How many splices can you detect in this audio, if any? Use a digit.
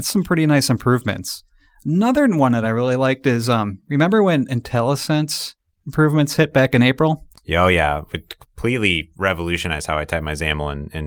0